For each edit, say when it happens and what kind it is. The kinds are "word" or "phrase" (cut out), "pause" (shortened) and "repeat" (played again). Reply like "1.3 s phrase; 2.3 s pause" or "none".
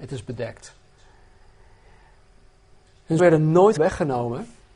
3.2 s word; 3.8 s word